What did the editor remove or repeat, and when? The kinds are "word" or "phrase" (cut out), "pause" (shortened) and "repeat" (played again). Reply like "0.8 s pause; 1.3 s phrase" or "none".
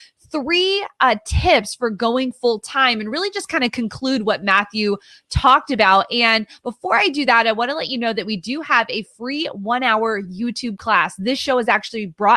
none